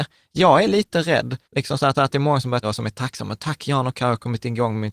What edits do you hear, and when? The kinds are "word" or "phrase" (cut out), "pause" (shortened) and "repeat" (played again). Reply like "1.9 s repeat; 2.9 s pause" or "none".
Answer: 1.4 s pause; 1.9 s repeat; 2.6 s word